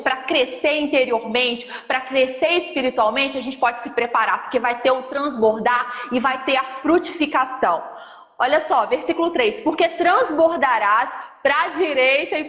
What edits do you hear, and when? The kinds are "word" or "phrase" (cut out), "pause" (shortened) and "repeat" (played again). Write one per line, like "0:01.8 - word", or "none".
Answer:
none